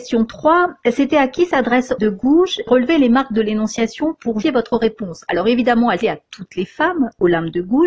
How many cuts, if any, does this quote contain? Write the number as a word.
four